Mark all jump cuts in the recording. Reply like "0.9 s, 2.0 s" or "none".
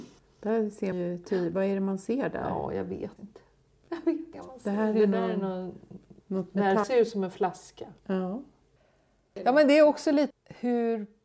0.9 s, 3.2 s, 4.3 s, 6.2 s, 6.8 s, 8.0 s, 10.3 s